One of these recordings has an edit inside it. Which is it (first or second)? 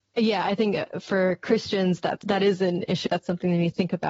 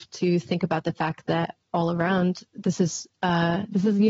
first